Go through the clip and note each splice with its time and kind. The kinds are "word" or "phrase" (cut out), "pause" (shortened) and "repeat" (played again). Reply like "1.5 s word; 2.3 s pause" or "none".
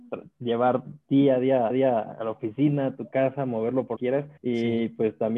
1.7 s repeat; 3.9 s word; 4.4 s pause

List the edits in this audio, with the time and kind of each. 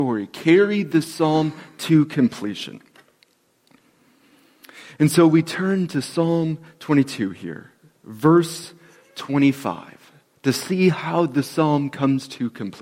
none

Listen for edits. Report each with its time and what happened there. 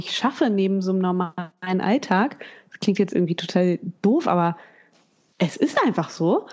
none

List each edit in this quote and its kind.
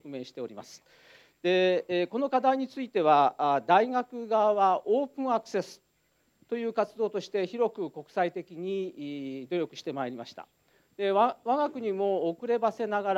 none

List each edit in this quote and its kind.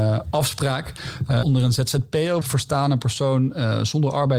1.4 s word; 2.4 s word

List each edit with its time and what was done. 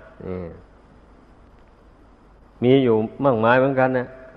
none

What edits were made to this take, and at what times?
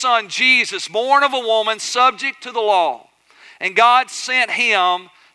none

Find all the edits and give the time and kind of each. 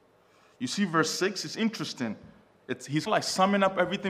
3.1 s word

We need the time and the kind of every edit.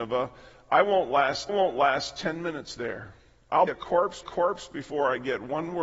1.5 s repeat; 3.7 s word; 4.2 s repeat

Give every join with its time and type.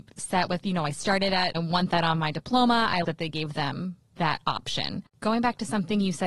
1.5 s phrase; 3.0 s word

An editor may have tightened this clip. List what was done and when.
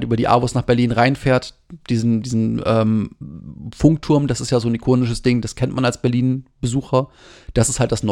none

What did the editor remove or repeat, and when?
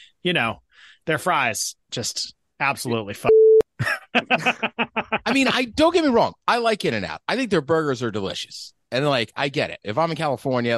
none

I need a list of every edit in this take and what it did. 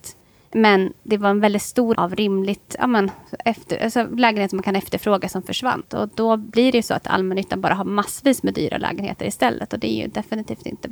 1.9 s word

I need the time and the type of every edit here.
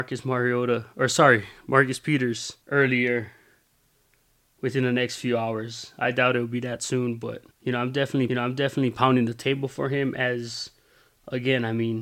2.6 s pause; 7.5 s pause; 8.3 s repeat

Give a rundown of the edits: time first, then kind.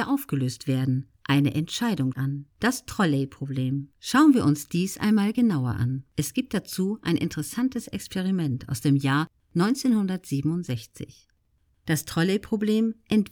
1.1 s pause; 2.1 s word; 2.5 s pause; 3.9 s pause; 6.1 s pause

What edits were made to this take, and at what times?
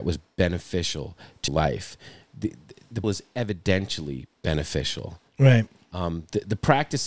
1.5 s word; 3.0 s word

